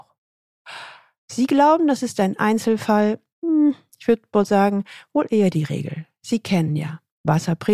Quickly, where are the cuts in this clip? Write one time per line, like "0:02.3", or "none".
none

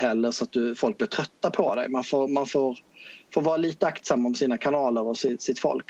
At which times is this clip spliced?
none

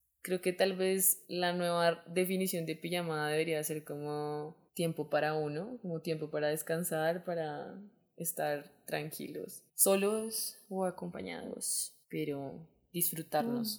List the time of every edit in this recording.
0:01.2
0:04.7
0:09.7
0:12.0

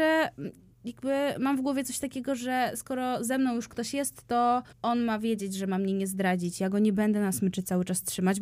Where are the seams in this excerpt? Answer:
0:04.7

